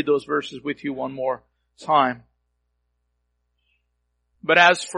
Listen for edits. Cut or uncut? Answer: uncut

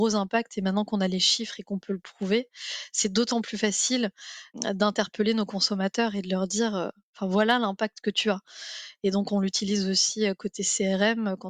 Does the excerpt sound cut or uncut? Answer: uncut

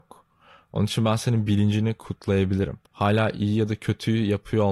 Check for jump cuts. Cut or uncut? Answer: cut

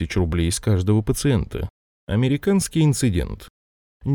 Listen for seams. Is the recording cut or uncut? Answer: cut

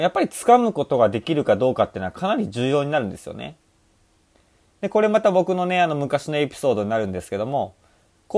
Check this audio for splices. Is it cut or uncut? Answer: uncut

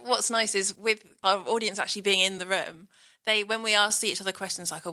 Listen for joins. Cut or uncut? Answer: uncut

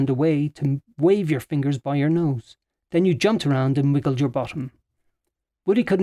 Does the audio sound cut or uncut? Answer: uncut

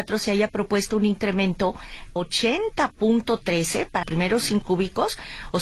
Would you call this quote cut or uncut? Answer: cut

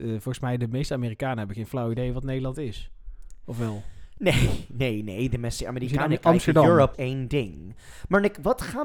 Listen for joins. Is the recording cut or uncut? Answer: cut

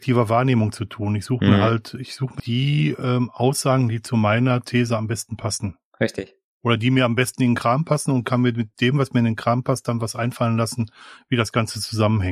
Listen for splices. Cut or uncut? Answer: cut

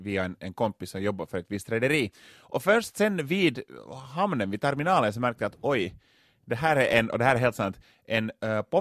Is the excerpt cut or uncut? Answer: uncut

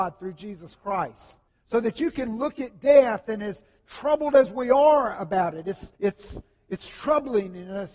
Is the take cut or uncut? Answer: cut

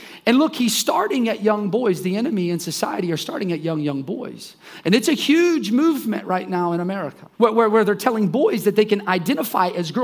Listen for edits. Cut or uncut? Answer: cut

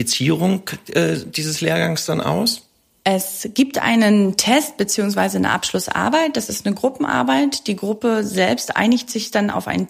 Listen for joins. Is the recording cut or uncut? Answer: uncut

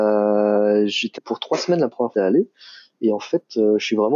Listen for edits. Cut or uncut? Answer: cut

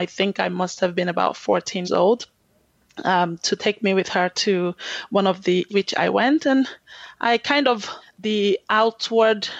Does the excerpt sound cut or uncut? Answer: cut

